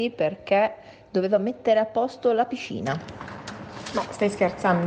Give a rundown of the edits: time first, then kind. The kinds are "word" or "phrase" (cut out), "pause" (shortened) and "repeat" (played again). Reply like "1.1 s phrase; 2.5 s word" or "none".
none